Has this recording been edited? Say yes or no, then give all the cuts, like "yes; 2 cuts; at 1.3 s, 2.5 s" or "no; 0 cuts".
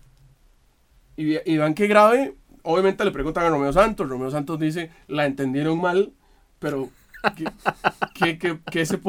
no; 0 cuts